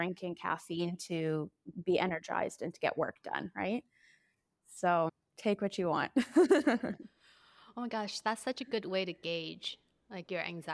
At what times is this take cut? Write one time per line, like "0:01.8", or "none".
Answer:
none